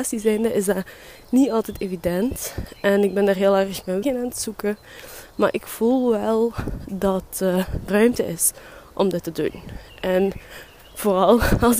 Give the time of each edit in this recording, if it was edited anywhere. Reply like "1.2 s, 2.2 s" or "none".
4.0 s, 7.9 s